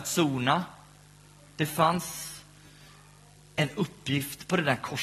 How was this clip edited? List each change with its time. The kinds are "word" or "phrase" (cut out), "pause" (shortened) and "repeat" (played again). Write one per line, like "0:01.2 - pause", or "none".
none